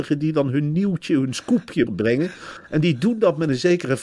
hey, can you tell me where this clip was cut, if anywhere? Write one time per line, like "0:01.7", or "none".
0:01.9

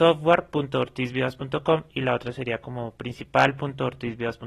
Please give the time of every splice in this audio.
none

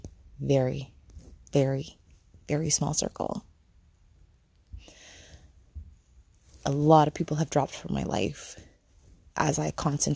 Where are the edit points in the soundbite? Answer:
none

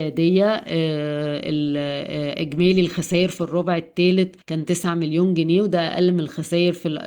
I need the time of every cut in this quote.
0:04.4

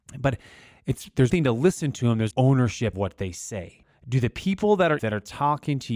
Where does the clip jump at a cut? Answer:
0:01.3
0:02.3
0:02.9
0:05.0

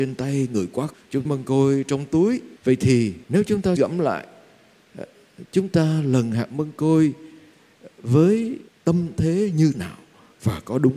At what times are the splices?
0:00.9
0:01.2
0:02.6
0:03.2
0:03.8
0:08.7
0:09.7

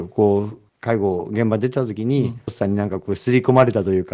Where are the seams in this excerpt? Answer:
0:02.5

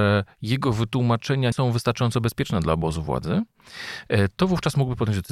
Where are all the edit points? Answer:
0:01.5

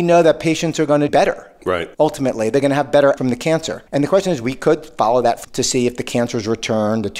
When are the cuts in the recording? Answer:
0:01.1
0:01.9
0:03.2
0:03.9
0:05.4

